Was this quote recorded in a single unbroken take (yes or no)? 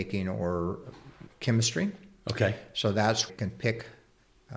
no